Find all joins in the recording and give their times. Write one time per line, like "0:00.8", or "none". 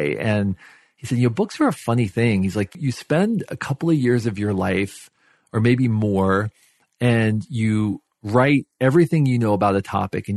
none